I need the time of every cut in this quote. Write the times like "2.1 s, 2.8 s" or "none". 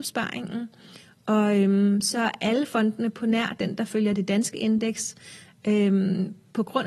none